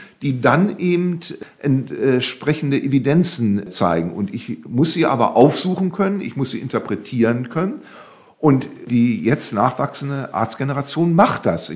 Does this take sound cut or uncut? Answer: uncut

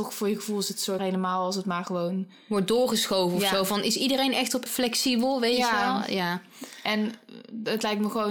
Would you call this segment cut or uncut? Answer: cut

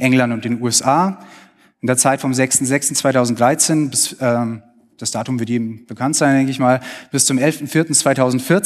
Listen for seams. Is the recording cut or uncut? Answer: uncut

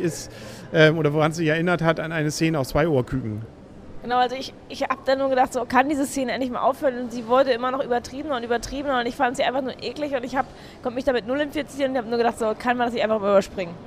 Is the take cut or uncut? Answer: uncut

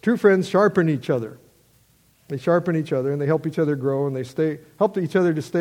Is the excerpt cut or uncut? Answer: uncut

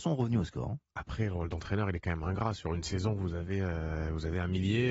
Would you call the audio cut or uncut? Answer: uncut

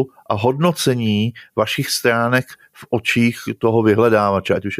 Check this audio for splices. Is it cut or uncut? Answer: uncut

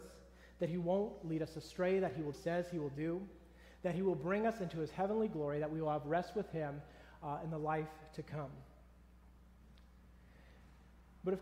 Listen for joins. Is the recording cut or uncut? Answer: cut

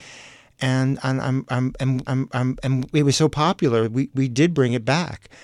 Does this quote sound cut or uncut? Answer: cut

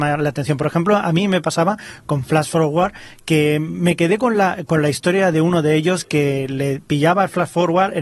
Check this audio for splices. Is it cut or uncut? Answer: uncut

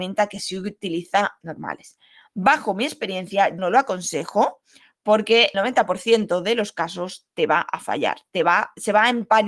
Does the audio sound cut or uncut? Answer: cut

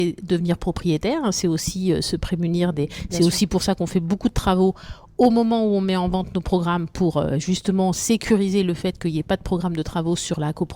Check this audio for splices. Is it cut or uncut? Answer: uncut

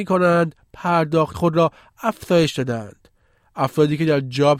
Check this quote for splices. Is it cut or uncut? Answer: cut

